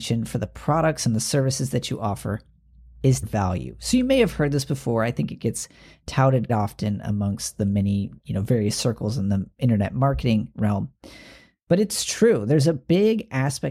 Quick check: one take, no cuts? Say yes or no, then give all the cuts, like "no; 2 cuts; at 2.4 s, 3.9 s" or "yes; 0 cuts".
no; 2 cuts; at 3.2 s, 6.5 s